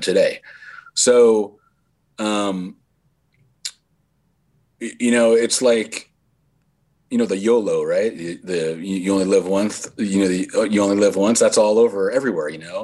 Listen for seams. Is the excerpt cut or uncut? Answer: uncut